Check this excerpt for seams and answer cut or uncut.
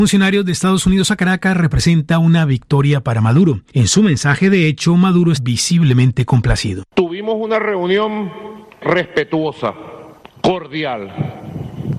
cut